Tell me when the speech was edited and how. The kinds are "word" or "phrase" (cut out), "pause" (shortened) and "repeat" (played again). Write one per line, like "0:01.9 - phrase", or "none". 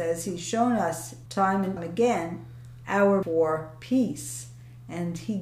0:01.3 - word
0:01.8 - word
0:03.2 - word